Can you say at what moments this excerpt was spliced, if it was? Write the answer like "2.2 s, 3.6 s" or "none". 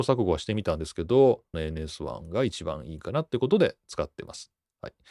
1.5 s